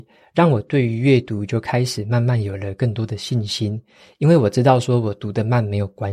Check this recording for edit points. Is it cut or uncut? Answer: uncut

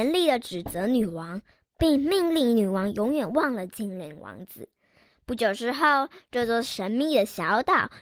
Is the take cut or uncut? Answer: uncut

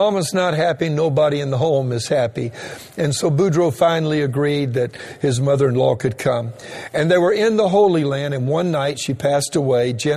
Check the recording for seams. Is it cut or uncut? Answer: uncut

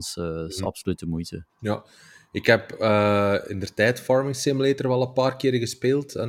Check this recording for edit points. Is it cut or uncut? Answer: cut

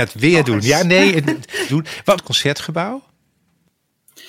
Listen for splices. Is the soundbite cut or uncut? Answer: cut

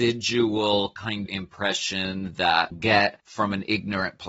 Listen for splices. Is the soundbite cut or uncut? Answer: cut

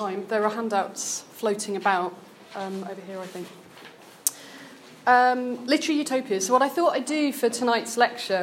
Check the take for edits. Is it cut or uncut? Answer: uncut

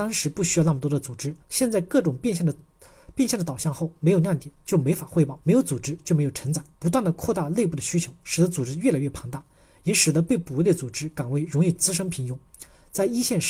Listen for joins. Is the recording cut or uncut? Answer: cut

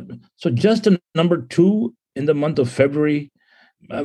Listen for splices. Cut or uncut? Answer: uncut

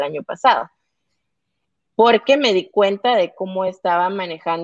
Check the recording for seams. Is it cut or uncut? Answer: uncut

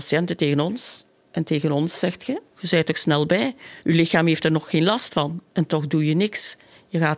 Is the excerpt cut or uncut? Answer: cut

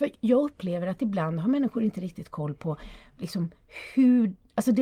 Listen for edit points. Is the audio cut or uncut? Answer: uncut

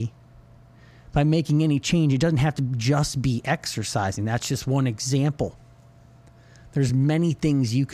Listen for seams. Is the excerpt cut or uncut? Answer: uncut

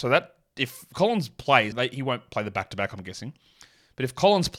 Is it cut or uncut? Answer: cut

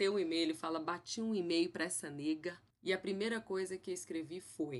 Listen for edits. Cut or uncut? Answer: cut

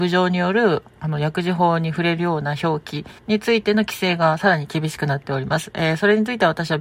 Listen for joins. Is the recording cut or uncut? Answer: cut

